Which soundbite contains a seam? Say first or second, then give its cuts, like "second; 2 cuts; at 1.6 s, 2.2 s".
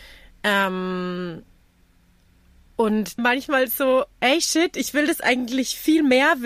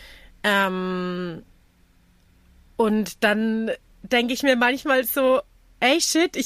first; 2 cuts; at 3.2 s, 4.1 s